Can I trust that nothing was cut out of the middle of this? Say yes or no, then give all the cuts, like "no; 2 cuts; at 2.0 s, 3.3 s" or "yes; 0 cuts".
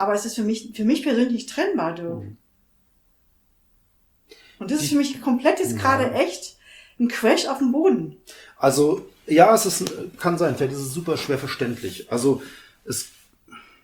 yes; 0 cuts